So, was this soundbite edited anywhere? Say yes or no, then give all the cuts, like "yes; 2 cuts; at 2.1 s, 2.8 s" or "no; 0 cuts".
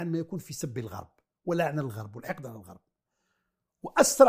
no; 0 cuts